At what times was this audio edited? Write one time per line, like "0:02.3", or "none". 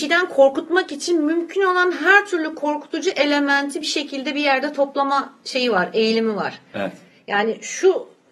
none